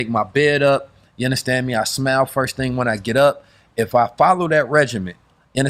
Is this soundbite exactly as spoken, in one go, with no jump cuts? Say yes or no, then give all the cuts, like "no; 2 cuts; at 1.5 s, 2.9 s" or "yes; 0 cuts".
yes; 0 cuts